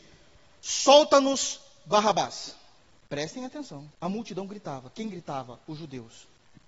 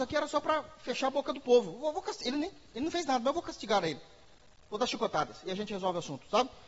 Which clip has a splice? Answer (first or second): first